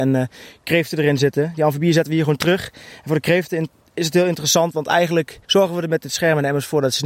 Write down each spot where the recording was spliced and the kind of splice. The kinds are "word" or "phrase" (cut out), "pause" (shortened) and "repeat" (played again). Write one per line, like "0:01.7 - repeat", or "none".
0:05.4 - pause